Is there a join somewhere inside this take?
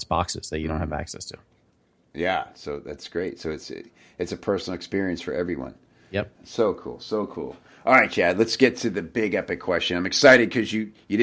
no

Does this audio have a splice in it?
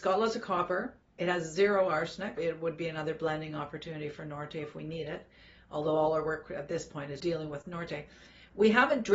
yes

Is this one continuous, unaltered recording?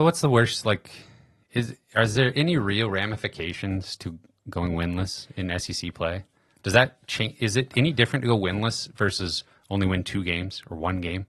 yes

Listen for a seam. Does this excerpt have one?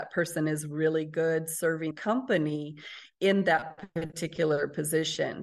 yes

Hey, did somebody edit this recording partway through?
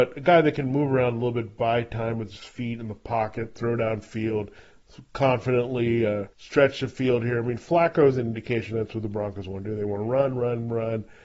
yes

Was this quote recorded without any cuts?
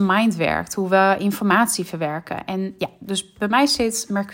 yes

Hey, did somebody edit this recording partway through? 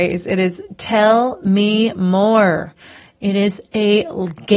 no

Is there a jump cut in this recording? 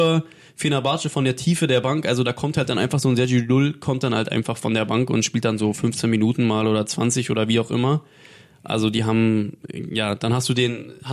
no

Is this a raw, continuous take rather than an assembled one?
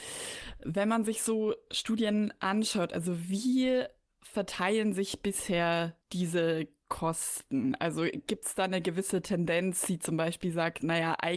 yes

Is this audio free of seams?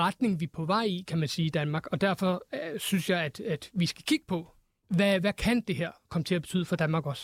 yes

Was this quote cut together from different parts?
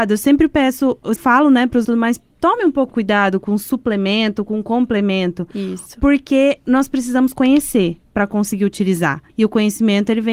yes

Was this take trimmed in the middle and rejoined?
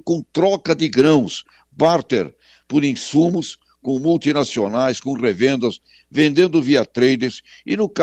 no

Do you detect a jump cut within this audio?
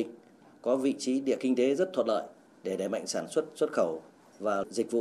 no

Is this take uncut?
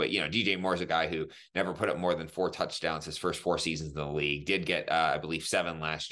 yes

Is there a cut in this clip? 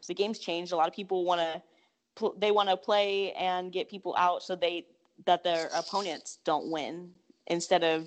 no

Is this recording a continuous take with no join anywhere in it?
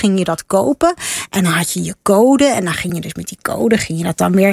yes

